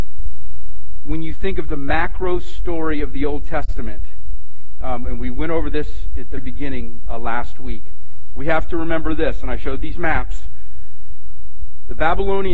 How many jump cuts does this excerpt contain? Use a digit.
1